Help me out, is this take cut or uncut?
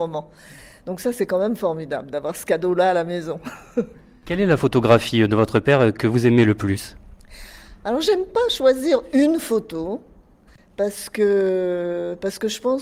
uncut